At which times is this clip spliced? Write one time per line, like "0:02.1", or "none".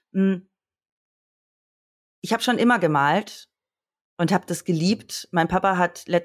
none